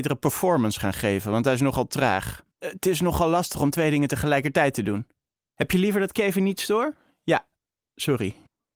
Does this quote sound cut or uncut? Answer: cut